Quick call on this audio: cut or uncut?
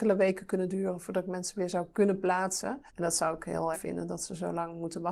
cut